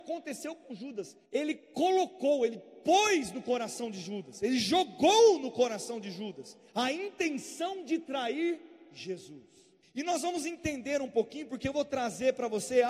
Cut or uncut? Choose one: cut